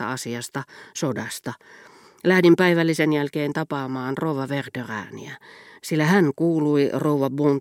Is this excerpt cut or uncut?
uncut